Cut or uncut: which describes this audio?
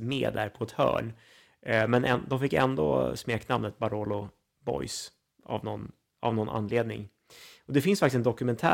uncut